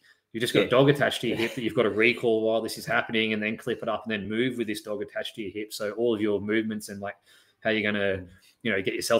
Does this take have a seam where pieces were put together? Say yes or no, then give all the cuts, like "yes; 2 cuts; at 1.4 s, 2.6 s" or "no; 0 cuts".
no; 0 cuts